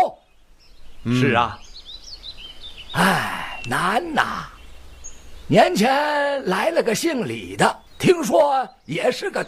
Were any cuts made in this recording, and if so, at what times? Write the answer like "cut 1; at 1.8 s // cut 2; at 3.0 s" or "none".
cut 1; at 7.9 s